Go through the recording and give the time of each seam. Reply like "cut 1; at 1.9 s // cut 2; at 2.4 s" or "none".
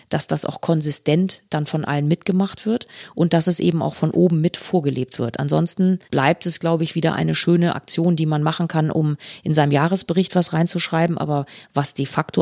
cut 1; at 6.0 s